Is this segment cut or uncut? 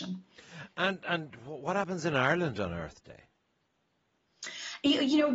uncut